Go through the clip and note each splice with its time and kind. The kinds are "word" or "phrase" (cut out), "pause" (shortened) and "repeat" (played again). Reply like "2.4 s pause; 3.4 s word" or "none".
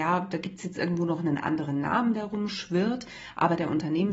none